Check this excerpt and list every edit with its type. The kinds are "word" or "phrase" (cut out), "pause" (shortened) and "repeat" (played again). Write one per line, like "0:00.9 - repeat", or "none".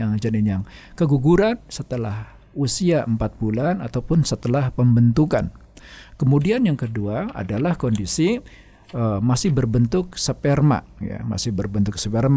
none